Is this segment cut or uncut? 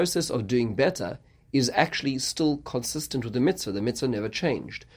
uncut